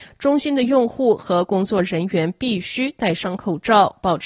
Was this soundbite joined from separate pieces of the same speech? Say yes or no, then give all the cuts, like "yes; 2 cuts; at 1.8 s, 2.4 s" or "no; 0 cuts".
no; 0 cuts